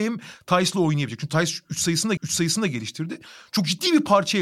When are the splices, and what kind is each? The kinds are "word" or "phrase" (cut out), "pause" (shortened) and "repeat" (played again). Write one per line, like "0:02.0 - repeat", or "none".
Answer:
0:02.2 - repeat